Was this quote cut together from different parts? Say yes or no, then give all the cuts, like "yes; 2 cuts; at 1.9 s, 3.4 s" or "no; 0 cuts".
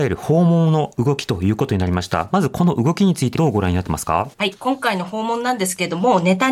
yes; 2 cuts; at 3.4 s, 4.3 s